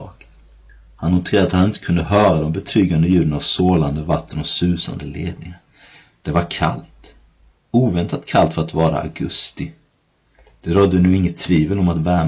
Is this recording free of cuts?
yes; 0 cuts

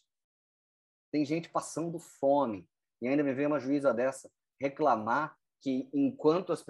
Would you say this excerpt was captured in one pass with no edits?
yes; 0 cuts

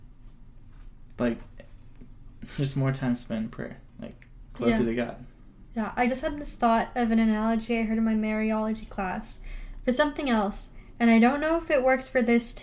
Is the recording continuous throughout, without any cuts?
no; 1 cut; at 3.9 s

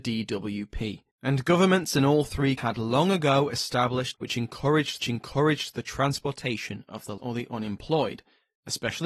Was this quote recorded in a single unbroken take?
no; 5 cuts; at 1.1 s, 2.6 s, 4.1 s, 5.0 s, 7.2 s

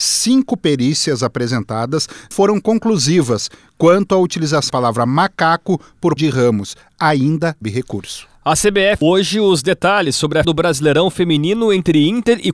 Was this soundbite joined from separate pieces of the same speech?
yes; 6 cuts; at 2.3 s, 4.7 s, 6.2 s, 7.6 s, 9.0 s, 10.4 s

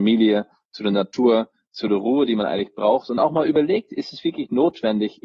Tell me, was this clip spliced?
no; 0 cuts

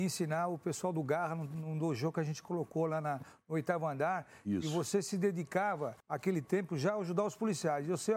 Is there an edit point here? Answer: yes; 1 cut; at 6.0 s

